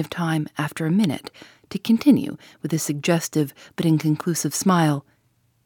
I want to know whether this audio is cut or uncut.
uncut